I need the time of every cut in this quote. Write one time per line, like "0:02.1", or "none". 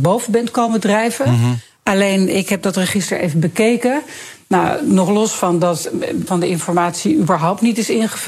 0:02.3
0:06.3